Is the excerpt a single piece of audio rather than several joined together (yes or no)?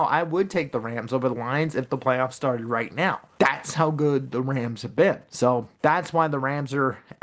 no